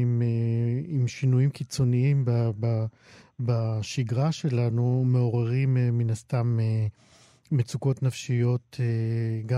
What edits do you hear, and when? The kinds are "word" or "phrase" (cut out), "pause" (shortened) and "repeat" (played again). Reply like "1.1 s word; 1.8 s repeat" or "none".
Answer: none